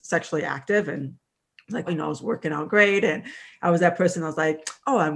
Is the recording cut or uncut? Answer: cut